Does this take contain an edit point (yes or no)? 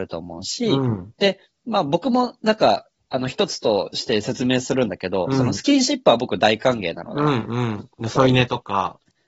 no